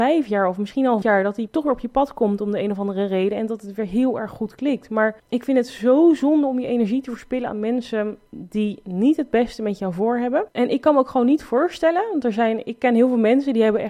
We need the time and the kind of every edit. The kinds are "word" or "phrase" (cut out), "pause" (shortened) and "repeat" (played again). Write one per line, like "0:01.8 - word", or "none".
0:01.0 - word
0:01.5 - word
0:05.2 - pause
0:08.3 - pause
0:10.5 - pause